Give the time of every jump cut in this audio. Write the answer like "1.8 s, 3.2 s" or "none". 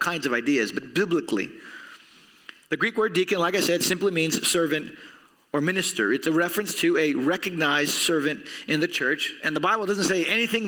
none